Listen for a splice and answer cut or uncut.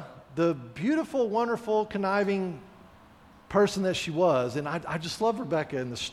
uncut